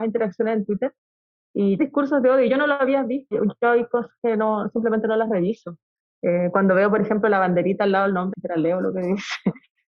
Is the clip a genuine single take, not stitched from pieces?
no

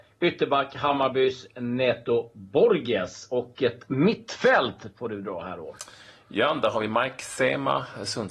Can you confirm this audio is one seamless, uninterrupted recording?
yes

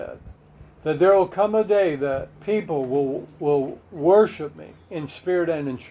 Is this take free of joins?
no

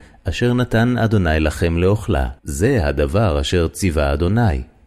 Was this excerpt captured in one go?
no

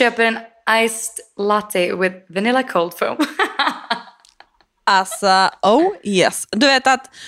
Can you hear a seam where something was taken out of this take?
no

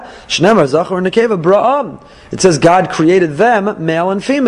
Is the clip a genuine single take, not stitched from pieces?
yes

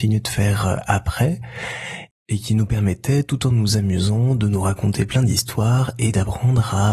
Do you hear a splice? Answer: no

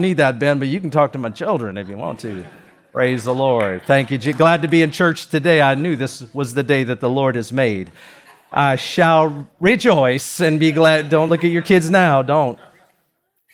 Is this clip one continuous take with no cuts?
yes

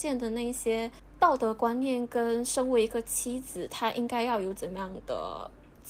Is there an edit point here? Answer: no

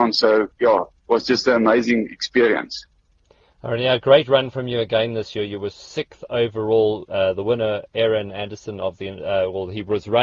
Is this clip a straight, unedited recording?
yes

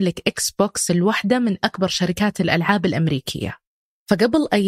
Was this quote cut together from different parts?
no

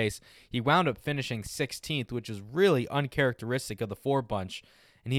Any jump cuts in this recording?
no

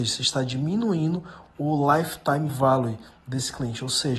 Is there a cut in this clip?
no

